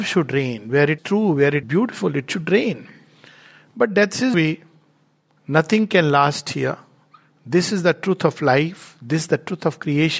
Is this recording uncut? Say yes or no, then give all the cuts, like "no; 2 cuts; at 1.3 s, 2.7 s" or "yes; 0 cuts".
no; 3 cuts; at 1.0 s, 1.6 s, 4.3 s